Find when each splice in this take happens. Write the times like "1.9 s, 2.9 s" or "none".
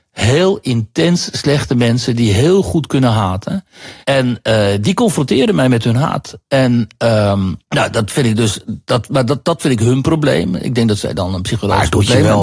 4.0 s, 7.6 s

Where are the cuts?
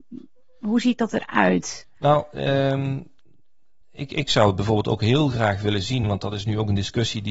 none

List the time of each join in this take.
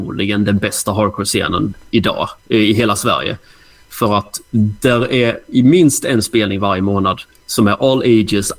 2.4 s

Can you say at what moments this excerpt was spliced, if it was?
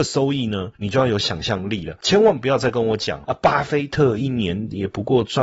3.2 s

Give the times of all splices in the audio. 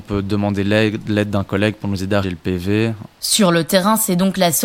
2.2 s

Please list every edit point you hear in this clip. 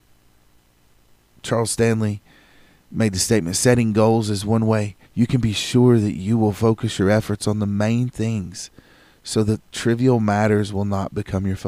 5.0 s

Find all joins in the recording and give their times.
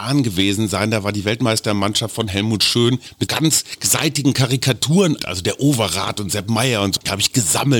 3.3 s, 5.2 s

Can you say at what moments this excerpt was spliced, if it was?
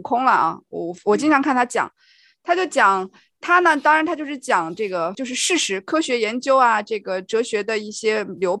5.1 s

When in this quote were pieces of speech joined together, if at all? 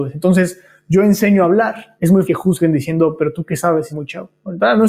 2.3 s, 3.9 s

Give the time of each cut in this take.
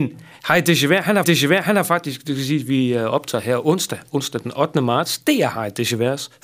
1.2 s

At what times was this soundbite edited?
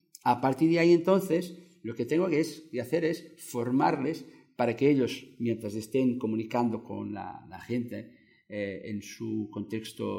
none

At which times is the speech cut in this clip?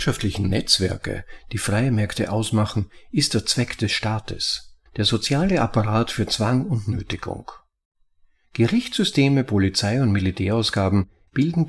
4.9 s

